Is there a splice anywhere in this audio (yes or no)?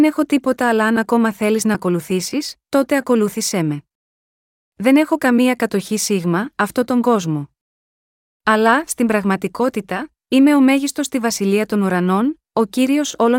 yes